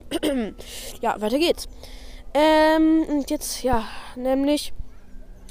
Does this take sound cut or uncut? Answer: uncut